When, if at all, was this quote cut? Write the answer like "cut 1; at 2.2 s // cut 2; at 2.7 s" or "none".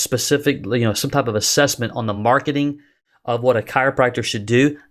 none